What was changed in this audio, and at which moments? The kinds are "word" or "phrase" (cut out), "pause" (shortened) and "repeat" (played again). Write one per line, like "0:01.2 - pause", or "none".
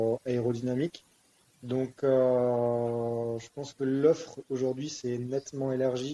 none